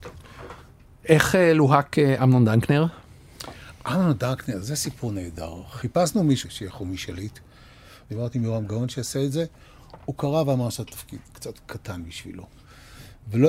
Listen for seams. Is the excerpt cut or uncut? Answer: uncut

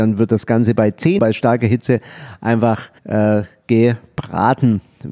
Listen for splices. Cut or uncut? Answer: cut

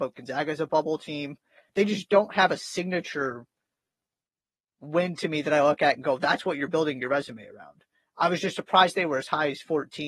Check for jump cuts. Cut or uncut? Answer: uncut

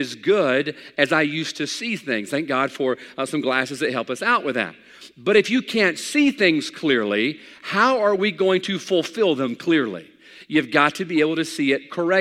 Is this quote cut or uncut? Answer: uncut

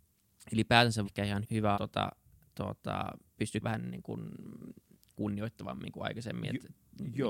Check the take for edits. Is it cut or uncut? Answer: cut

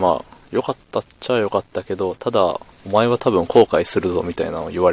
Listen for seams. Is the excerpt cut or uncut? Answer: cut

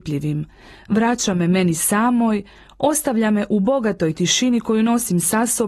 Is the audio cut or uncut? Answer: uncut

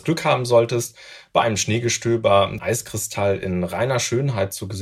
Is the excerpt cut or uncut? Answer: cut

